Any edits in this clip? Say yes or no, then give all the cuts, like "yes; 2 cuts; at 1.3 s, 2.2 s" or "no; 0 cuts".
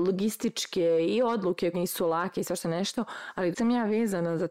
yes; 2 cuts; at 1.7 s, 3.5 s